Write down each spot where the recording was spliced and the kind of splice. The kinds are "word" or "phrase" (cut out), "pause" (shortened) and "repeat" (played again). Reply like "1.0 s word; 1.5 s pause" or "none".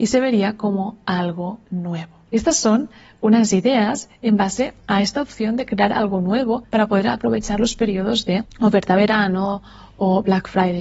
none

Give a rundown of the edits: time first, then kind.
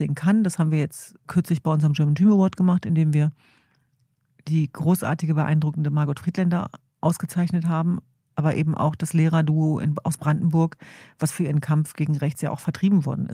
none

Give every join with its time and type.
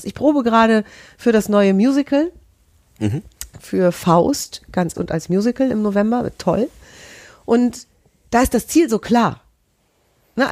4.9 s word

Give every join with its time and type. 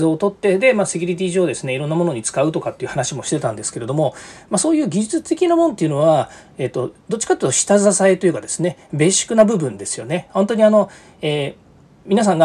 none

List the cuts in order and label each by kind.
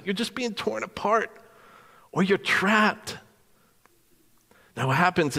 none

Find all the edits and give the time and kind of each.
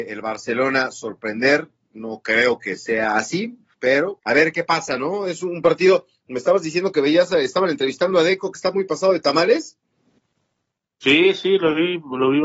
4.2 s word

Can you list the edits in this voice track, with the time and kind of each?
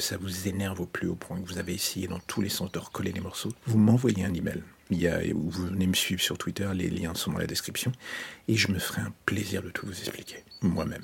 4.8 s pause

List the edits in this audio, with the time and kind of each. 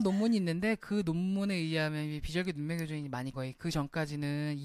3.3 s phrase

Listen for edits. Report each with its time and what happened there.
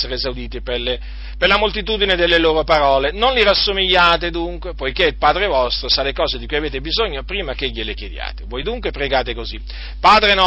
none

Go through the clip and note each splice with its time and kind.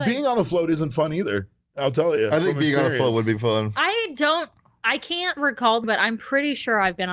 5.8 s word

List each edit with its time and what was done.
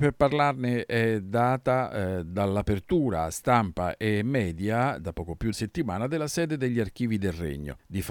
5.5 s phrase

